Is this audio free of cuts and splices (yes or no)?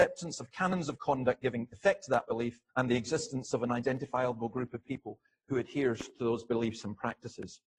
no